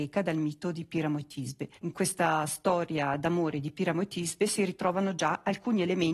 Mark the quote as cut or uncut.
cut